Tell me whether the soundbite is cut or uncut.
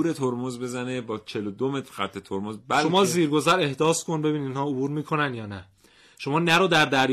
uncut